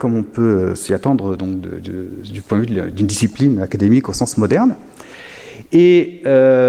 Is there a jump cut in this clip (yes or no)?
no